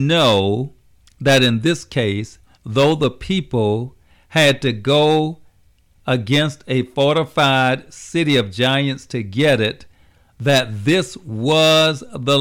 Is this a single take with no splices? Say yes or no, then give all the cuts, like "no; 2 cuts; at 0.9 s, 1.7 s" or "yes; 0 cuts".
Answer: yes; 0 cuts